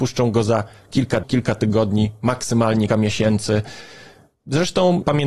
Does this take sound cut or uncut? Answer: cut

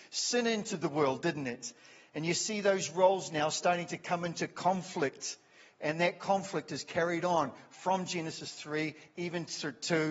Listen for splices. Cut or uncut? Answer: uncut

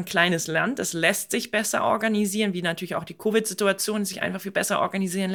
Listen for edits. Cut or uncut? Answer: uncut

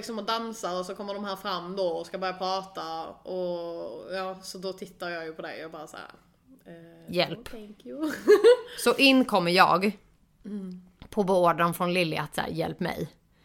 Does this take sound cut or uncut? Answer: uncut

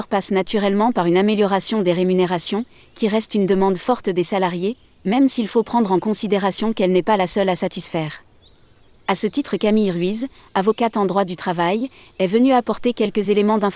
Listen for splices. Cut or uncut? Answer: uncut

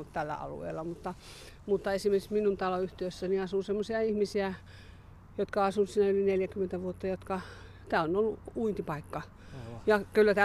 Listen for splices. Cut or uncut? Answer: uncut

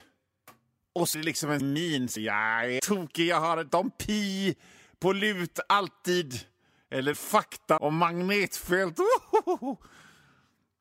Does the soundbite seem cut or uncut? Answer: cut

